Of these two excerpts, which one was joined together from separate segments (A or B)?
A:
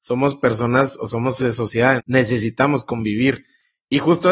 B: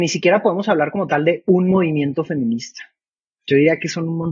A